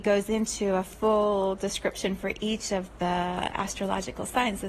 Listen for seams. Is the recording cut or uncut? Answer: uncut